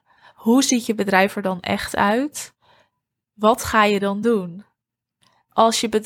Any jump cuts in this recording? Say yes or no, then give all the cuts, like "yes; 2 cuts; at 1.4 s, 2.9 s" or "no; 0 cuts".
no; 0 cuts